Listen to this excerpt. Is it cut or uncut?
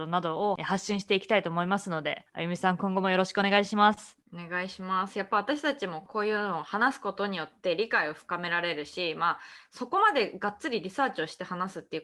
uncut